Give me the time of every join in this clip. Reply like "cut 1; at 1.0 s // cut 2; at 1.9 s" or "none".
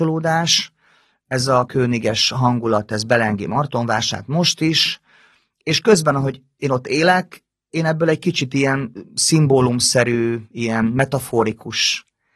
cut 1; at 1.7 s